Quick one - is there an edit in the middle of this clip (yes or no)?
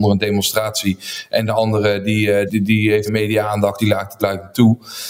yes